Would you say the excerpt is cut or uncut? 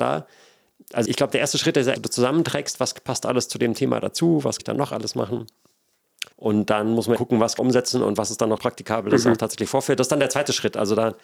cut